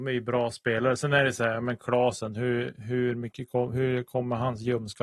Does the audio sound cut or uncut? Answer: uncut